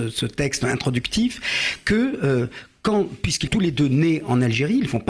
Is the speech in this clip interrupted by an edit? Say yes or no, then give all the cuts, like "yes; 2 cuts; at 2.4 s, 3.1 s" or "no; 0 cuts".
yes; 1 cut; at 3.5 s